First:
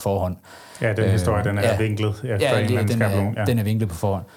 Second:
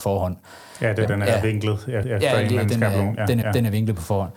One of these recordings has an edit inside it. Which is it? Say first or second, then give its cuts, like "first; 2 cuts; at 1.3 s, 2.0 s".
second; 3 cuts; at 1.0 s, 2.0 s, 3.4 s